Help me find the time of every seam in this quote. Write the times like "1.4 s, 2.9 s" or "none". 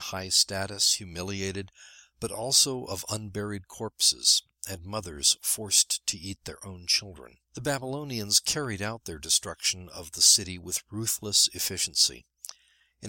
7.4 s